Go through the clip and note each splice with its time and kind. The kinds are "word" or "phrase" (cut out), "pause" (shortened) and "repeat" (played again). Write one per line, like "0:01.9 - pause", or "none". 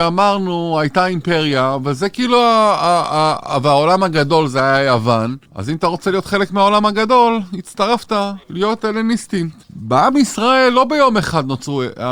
0:05.5 - pause
0:08.4 - pause
0:09.6 - pause